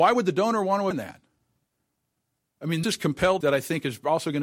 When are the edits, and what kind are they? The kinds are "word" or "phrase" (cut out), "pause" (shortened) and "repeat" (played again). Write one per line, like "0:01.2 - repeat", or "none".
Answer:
0:00.9 - word
0:02.8 - word
0:03.4 - word

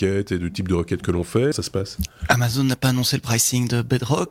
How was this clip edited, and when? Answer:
0:01.5 - phrase

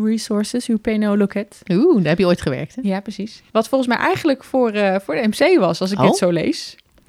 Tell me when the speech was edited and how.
0:03.5 - pause

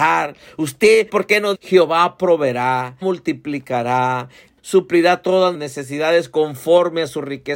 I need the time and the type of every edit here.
0:01.1 - word
0:01.5 - word
0:03.0 - word
0:04.6 - word
0:05.5 - word

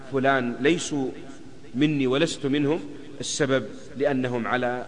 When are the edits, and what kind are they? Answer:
none

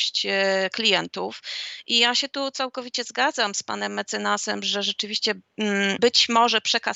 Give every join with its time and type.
0:06.0 - word

